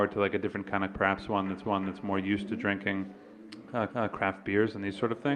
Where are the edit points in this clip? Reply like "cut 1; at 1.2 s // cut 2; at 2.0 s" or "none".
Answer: cut 1; at 0.9 s // cut 2; at 1.6 s // cut 3; at 3.9 s